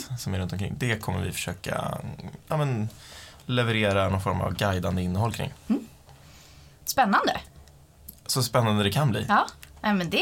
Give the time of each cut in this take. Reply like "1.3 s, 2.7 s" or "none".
none